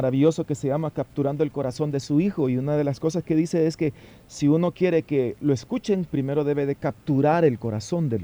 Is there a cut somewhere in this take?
no; 0 cuts

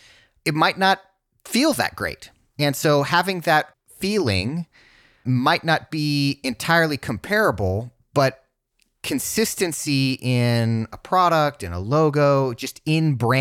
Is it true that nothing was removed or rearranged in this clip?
yes; 0 cuts

